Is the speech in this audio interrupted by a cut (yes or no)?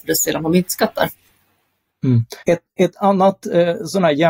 yes